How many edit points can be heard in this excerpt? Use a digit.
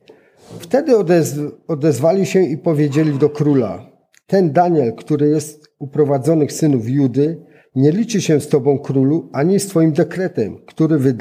0